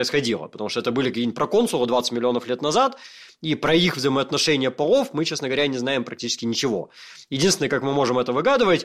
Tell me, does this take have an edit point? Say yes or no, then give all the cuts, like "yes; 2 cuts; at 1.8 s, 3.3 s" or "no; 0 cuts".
no; 0 cuts